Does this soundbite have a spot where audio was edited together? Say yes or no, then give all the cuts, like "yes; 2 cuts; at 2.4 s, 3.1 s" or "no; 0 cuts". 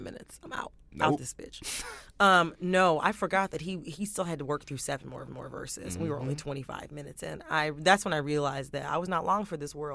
yes; 1 cut; at 5.3 s